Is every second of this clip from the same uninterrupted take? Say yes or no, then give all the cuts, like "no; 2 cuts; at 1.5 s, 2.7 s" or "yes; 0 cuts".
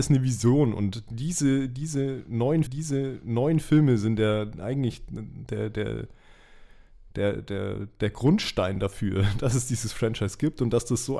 no; 1 cut; at 2.7 s